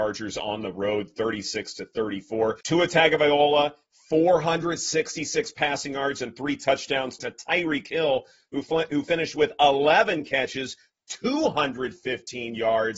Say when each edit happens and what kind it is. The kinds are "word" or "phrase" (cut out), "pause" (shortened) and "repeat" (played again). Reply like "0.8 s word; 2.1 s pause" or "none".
2.6 s pause; 7.2 s phrase